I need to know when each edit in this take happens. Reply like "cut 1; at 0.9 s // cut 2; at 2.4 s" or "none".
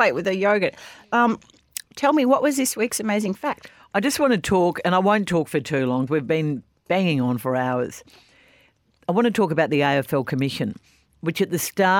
cut 1; at 6.1 s